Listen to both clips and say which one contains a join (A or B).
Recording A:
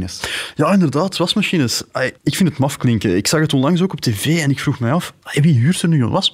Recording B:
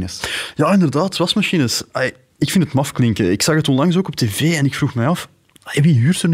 A